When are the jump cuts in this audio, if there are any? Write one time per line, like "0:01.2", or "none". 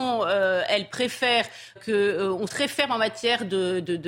0:01.8
0:02.5